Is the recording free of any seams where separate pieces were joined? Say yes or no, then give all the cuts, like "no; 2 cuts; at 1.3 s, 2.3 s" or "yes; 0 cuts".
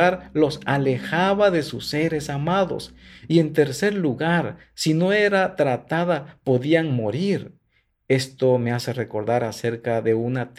yes; 0 cuts